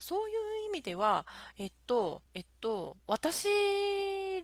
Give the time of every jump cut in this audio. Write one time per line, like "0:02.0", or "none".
0:02.3
0:03.0